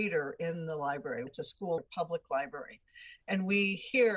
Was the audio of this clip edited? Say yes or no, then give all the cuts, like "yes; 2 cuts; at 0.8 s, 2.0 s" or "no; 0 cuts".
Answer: yes; 2 cuts; at 1.3 s, 1.8 s